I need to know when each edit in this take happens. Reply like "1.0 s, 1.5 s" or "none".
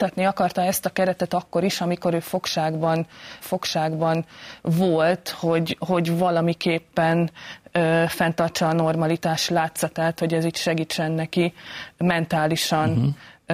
3.4 s